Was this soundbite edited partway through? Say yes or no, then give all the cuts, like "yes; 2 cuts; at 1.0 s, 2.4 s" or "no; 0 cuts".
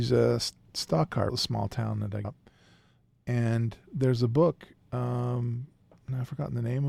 yes; 2 cuts; at 1.3 s, 2.2 s